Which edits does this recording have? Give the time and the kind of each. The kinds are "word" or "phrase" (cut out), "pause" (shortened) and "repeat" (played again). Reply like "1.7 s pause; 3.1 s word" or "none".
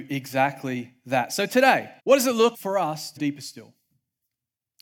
2.0 s pause; 2.5 s word; 3.2 s word